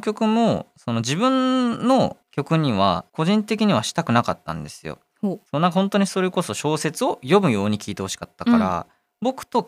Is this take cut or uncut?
cut